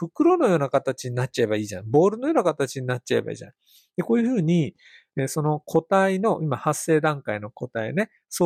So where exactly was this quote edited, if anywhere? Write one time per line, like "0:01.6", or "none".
none